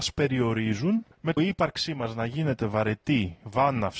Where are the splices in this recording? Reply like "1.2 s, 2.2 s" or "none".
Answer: 1.4 s